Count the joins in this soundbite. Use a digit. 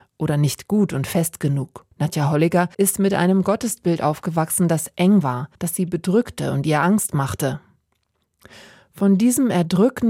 3